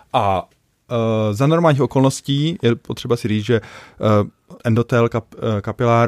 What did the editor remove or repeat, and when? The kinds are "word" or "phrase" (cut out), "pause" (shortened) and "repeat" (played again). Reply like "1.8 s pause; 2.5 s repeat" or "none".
4.6 s pause